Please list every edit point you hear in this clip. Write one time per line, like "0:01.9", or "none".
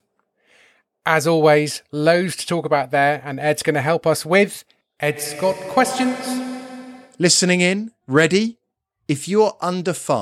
0:08.0